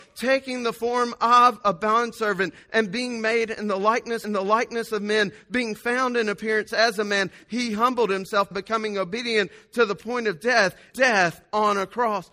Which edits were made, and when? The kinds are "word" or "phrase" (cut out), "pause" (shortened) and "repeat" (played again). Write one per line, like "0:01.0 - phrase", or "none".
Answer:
0:04.2 - repeat
0:08.5 - word
0:10.9 - word